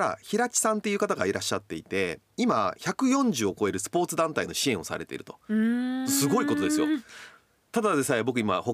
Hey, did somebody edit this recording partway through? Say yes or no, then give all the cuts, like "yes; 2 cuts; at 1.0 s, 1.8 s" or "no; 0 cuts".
no; 0 cuts